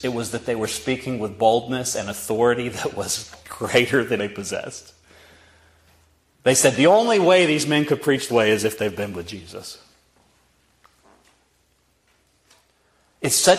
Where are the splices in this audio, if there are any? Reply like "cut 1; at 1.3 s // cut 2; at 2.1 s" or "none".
cut 1; at 3.4 s // cut 2; at 4.2 s // cut 3; at 8.3 s